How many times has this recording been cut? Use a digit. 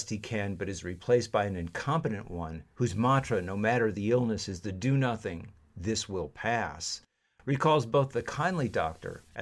0